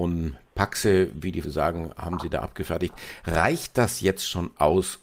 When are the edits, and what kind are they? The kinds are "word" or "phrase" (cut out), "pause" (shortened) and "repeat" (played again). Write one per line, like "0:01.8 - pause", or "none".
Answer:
0:01.4 - word